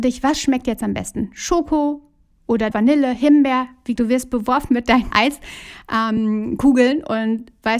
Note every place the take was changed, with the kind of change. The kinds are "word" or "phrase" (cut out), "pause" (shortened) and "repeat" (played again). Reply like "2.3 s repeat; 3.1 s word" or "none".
2.7 s word; 4.0 s word; 5.1 s word